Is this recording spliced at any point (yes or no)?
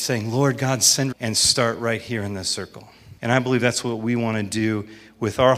yes